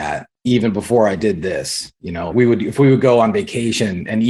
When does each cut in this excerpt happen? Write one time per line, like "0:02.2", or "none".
0:02.3

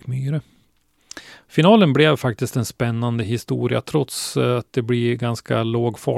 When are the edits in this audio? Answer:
none

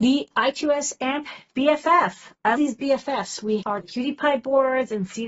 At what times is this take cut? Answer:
0:02.5
0:03.6

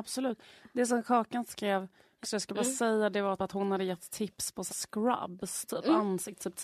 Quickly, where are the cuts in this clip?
0:02.2
0:03.4
0:04.7

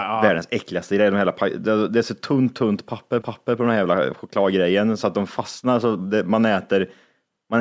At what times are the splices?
0:03.2

